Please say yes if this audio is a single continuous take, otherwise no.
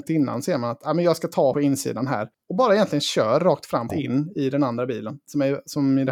no